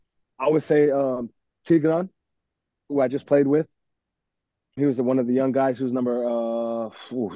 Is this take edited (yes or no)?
yes